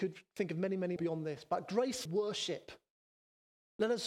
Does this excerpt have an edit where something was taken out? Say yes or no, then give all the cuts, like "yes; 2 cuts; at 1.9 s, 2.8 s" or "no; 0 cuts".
yes; 2 cuts; at 1.0 s, 2.1 s